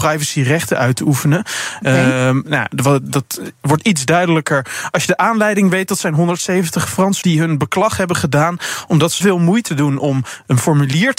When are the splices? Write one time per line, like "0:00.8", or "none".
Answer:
0:07.2
0:09.2
0:09.7